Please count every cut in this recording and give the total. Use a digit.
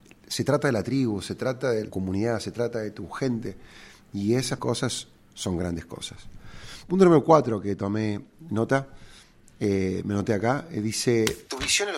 2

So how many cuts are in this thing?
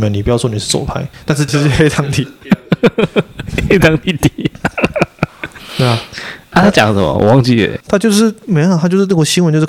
1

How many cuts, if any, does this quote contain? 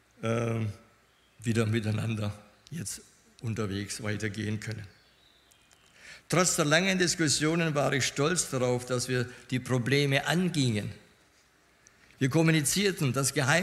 0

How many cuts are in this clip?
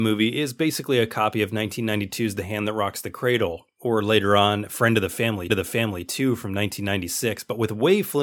1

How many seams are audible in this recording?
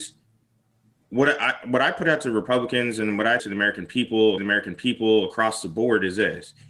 2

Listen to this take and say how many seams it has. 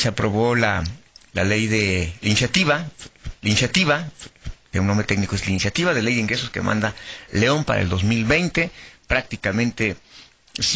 2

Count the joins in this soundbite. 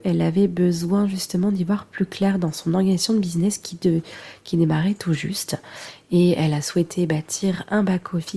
0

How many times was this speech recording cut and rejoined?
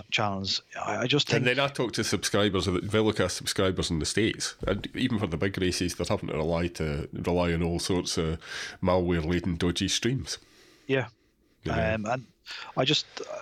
0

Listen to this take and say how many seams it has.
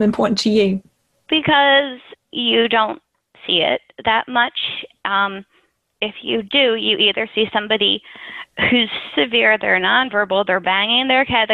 1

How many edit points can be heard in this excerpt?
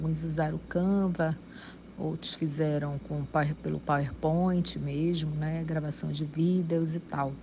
0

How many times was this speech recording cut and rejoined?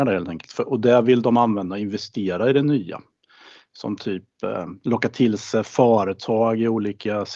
0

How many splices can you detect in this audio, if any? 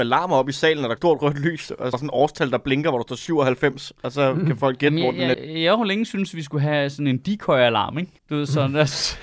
4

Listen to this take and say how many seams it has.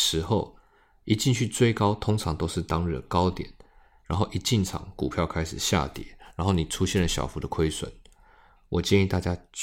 0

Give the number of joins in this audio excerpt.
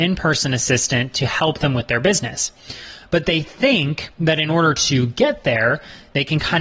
1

